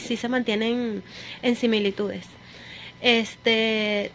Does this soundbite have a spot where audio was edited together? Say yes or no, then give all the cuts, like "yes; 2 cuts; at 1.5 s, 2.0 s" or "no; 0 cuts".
no; 0 cuts